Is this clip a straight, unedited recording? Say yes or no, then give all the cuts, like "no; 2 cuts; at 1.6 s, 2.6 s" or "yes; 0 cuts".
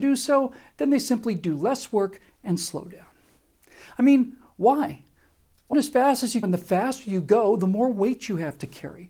no; 2 cuts; at 5.7 s, 6.4 s